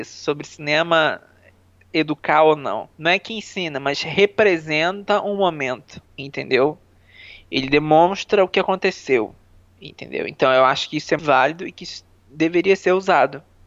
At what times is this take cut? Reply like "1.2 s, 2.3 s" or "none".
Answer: 2.9 s, 6.1 s, 11.2 s